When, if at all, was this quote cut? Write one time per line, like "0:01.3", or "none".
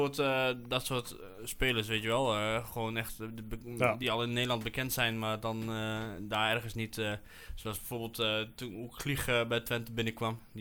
none